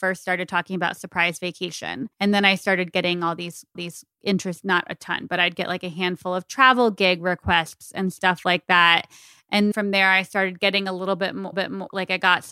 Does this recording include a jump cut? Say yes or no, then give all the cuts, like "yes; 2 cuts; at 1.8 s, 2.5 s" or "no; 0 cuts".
yes; 4 cuts; at 2.1 s, 3.7 s, 9.7 s, 11.5 s